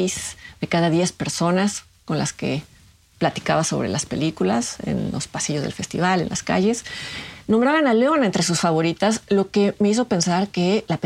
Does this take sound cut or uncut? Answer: uncut